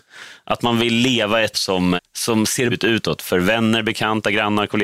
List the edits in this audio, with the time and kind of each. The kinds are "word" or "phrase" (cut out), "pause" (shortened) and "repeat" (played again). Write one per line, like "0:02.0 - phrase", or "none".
0:01.5 - word
0:02.0 - word
0:02.7 - word